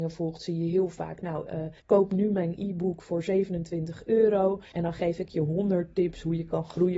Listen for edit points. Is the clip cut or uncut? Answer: cut